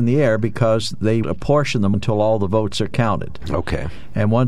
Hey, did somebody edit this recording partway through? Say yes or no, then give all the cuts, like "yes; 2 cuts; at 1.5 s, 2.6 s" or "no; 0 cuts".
yes; 2 cuts; at 1.2 s, 1.9 s